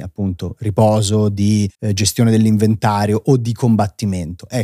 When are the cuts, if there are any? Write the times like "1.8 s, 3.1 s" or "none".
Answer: 1.7 s